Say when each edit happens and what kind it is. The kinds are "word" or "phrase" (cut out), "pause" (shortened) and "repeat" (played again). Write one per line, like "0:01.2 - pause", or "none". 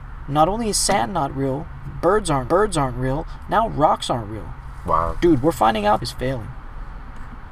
0:02.5 - repeat
0:06.0 - phrase